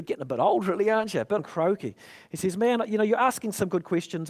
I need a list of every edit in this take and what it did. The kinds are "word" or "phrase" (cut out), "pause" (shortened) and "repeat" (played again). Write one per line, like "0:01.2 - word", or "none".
0:01.4 - word